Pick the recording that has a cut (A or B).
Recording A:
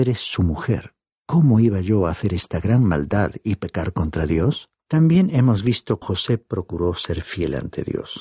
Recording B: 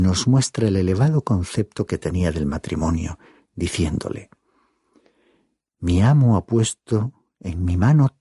A